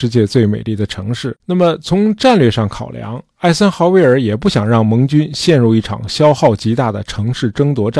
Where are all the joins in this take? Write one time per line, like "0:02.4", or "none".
0:01.4